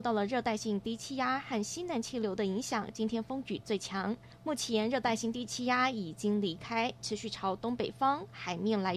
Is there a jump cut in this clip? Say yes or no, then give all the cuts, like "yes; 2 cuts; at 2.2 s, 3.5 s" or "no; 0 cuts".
no; 0 cuts